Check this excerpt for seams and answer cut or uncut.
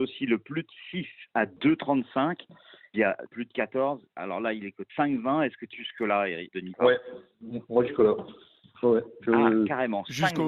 cut